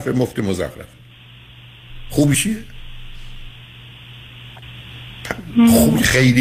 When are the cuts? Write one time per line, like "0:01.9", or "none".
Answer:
0:02.3